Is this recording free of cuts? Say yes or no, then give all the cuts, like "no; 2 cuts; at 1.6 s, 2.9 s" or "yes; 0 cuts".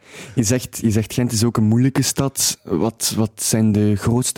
yes; 0 cuts